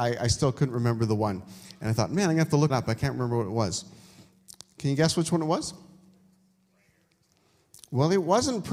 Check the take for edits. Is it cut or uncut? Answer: cut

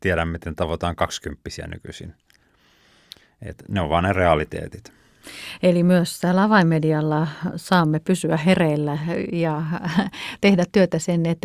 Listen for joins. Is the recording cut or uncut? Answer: uncut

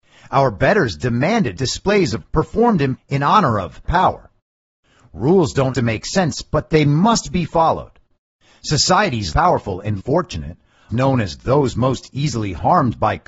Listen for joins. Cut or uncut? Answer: cut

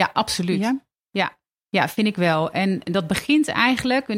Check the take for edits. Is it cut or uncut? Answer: uncut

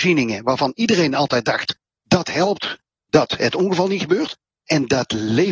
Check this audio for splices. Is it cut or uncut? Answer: uncut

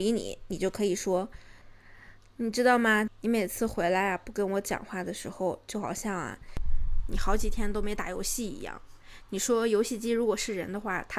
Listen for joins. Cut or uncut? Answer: cut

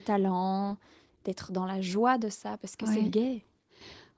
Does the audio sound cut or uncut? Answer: uncut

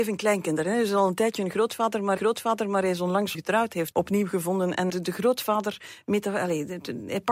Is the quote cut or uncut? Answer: cut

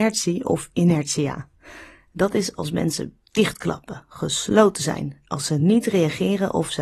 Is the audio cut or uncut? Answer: uncut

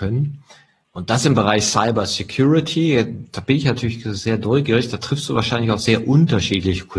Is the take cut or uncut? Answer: uncut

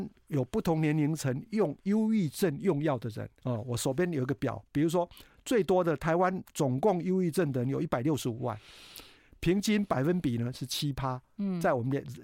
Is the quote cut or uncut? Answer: cut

